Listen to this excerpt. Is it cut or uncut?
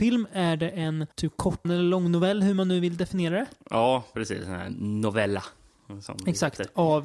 cut